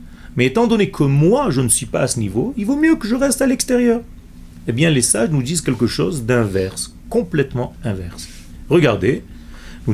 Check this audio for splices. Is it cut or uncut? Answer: uncut